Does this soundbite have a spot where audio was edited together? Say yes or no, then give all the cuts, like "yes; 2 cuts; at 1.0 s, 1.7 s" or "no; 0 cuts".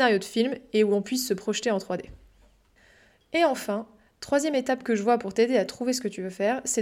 no; 0 cuts